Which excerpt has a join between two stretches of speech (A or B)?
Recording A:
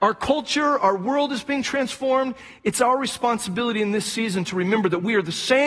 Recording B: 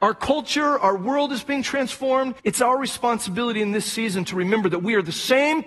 B